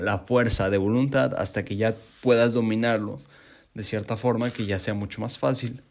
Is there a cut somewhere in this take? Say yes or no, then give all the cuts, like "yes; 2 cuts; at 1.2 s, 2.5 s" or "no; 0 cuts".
no; 0 cuts